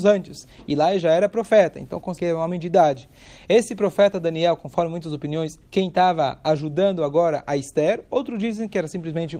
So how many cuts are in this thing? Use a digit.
2